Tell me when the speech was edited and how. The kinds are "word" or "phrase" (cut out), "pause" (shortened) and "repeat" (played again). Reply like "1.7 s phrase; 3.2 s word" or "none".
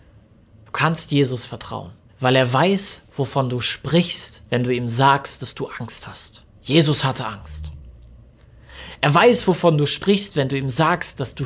2.1 s pause; 4.5 s pause; 6.5 s pause